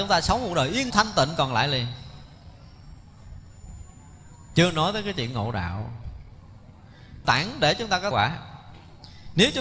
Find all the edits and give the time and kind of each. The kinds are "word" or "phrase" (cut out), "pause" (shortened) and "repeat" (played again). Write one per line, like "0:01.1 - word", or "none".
0:00.9 - word
0:07.2 - phrase
0:08.1 - phrase